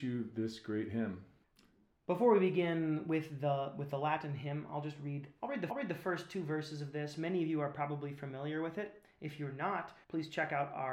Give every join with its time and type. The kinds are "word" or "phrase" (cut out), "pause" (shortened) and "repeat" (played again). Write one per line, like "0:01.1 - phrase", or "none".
0:05.7 - repeat
0:10.0 - pause